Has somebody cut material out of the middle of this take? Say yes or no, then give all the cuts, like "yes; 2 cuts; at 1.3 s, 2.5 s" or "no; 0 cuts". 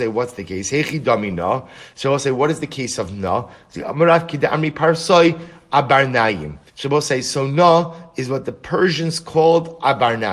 yes; 2 cuts; at 3.7 s, 6.7 s